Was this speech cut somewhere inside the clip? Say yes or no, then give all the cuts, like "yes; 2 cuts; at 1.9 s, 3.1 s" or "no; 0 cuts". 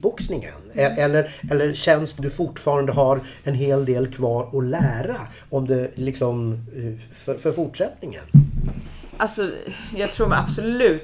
yes; 1 cut; at 2.2 s